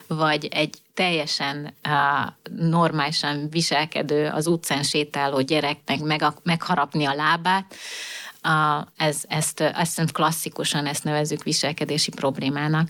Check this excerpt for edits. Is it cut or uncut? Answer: uncut